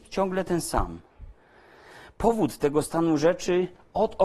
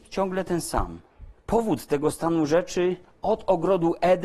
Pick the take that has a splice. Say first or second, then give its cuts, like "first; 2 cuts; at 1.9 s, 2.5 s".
second; 1 cut; at 1.4 s